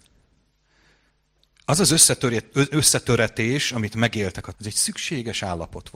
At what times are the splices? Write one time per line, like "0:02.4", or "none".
0:04.5